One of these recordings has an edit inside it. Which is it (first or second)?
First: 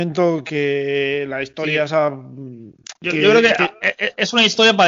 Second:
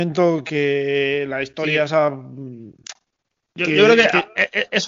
first